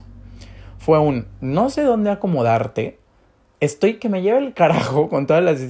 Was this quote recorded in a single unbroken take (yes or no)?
yes